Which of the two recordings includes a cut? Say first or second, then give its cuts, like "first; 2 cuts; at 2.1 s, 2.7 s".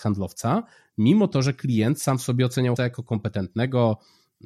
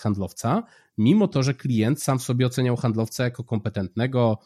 first; 1 cut; at 2.8 s